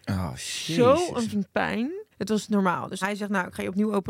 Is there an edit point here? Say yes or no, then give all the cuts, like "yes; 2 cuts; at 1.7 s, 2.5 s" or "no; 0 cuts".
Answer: yes; 4 cuts; at 1.3 s, 2.1 s, 2.5 s, 3.0 s